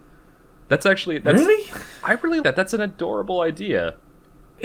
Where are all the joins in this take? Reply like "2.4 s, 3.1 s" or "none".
2.4 s